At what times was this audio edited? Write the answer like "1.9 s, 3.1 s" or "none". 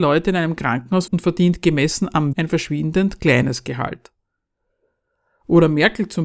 1.1 s, 2.3 s